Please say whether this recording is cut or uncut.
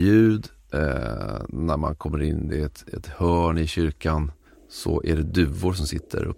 cut